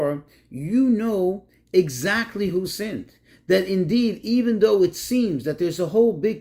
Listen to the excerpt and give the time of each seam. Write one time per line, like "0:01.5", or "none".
none